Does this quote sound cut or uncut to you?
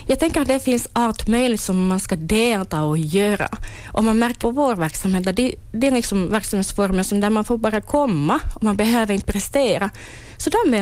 cut